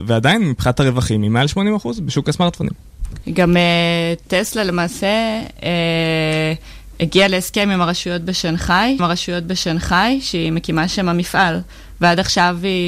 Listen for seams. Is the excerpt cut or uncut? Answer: cut